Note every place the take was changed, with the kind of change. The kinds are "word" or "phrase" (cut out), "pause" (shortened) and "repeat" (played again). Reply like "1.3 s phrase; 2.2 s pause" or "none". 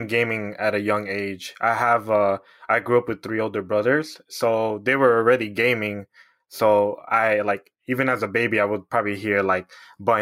none